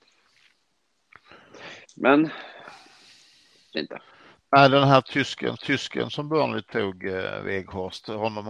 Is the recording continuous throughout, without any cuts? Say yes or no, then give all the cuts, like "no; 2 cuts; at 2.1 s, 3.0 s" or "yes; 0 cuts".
no; 3 cuts; at 1.8 s, 3.7 s, 5.6 s